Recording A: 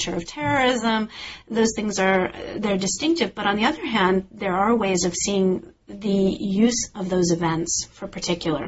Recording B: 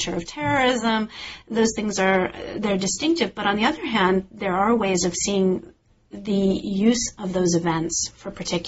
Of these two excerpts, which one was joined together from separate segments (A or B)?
A